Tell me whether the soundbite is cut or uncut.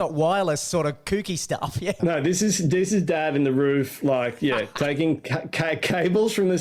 uncut